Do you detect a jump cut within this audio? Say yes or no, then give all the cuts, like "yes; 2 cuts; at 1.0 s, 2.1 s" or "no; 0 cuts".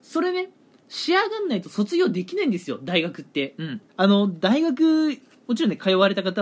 yes; 1 cut; at 3.9 s